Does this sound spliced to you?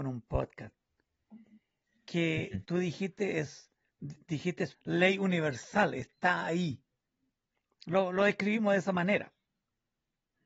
yes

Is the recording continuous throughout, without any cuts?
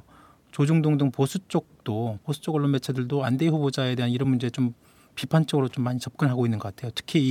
yes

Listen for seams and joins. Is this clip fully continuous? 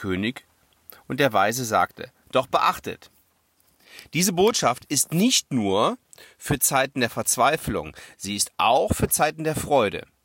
yes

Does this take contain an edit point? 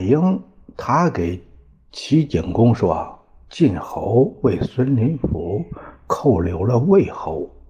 no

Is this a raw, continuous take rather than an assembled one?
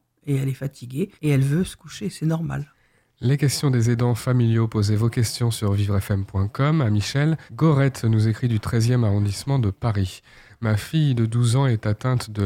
no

